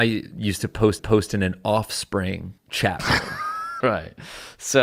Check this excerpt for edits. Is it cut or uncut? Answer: cut